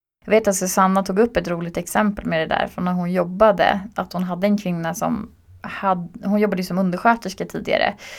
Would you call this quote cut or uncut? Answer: uncut